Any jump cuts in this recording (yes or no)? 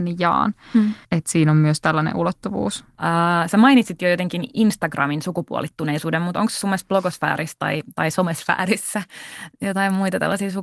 yes